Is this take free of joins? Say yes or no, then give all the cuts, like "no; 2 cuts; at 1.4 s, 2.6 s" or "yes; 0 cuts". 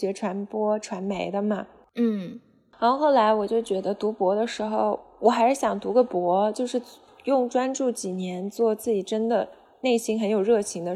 yes; 0 cuts